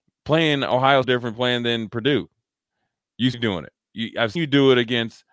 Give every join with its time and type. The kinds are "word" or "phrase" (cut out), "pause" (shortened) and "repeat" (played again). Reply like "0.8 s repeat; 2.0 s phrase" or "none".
1.0 s phrase; 3.3 s word; 3.8 s pause; 4.3 s word